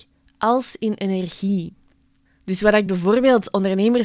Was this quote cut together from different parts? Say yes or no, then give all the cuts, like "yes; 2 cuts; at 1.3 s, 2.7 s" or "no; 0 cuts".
no; 0 cuts